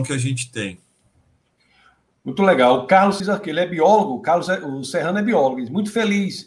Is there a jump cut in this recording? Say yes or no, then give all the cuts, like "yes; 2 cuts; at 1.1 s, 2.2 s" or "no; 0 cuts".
yes; 1 cut; at 3.2 s